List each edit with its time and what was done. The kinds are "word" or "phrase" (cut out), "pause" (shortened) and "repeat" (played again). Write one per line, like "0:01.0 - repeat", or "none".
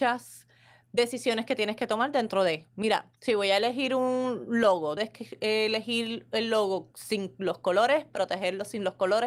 0:03.2 - pause
0:05.0 - word